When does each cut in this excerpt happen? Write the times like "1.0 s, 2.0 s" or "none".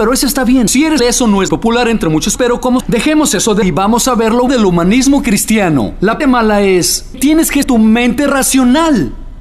1.0 s, 1.5 s, 2.4 s, 2.8 s, 3.6 s, 4.5 s, 6.2 s, 7.1 s, 7.6 s